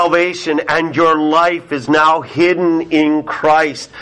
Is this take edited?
no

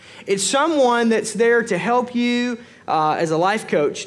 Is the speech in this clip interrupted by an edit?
no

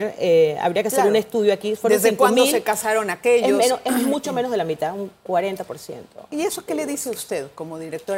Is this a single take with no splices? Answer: yes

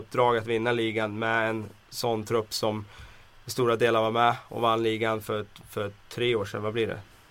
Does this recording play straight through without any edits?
yes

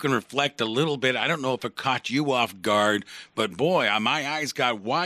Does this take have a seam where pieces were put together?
no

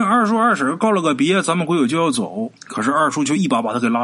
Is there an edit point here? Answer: yes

